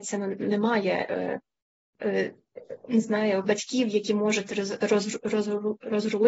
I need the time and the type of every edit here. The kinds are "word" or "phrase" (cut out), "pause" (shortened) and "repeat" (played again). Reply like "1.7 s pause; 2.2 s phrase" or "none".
3.4 s word